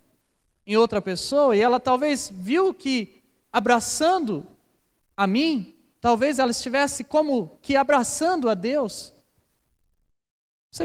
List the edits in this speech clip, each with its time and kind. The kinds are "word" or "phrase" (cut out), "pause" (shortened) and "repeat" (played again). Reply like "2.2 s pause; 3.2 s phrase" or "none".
none